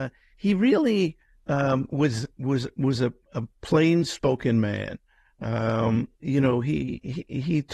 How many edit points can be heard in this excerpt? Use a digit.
0